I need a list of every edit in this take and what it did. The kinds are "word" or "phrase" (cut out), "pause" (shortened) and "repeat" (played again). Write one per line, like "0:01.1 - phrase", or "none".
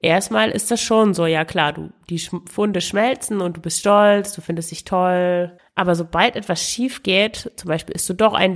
none